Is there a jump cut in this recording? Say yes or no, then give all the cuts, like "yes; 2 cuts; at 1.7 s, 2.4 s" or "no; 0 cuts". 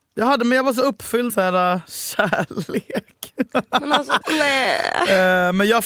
yes; 2 cuts; at 1.3 s, 4.2 s